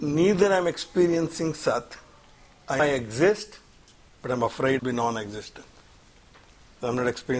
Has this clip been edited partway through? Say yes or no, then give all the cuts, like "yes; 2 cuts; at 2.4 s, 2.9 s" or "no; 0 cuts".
yes; 2 cuts; at 2.8 s, 4.8 s